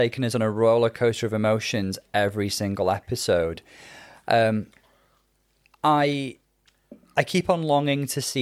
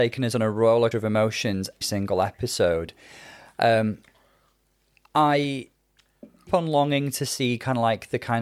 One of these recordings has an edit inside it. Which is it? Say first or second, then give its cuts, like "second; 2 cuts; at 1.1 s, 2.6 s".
second; 3 cuts; at 0.9 s, 1.8 s, 6.5 s